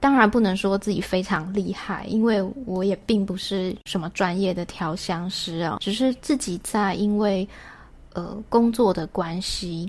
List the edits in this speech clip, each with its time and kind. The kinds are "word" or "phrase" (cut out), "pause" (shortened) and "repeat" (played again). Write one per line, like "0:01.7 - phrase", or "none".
0:03.8 - pause
0:05.8 - word